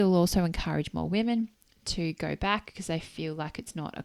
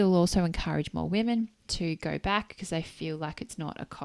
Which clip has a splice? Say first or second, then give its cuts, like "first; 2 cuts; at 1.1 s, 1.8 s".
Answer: second; 1 cut; at 1.6 s